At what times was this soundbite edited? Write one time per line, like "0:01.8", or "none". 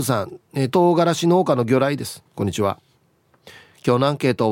0:02.3